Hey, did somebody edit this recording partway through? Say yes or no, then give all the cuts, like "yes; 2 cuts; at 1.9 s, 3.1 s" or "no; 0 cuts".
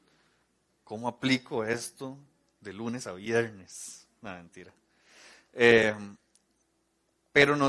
no; 0 cuts